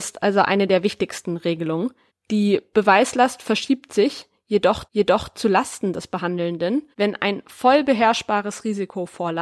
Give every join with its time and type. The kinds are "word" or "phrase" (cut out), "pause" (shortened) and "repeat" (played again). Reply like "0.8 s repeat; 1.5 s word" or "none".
2.1 s pause; 4.9 s repeat; 6.9 s pause